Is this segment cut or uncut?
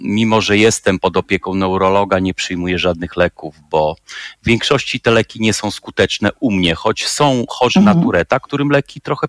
uncut